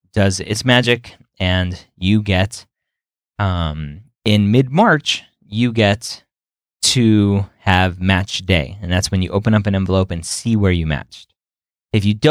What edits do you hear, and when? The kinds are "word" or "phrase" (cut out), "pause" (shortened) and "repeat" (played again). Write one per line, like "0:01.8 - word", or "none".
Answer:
none